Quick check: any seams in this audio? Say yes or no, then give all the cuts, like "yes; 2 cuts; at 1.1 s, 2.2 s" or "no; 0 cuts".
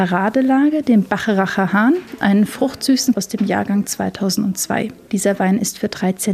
yes; 1 cut; at 3.1 s